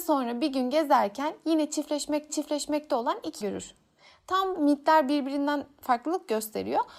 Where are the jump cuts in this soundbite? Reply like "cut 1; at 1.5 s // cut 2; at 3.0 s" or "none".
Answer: cut 1; at 2.3 s // cut 2; at 3.4 s // cut 3; at 4.5 s